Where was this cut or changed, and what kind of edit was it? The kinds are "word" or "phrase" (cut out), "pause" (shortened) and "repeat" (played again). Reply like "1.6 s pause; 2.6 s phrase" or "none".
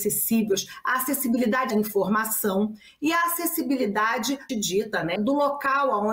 1.7 s word; 4.5 s word; 5.2 s word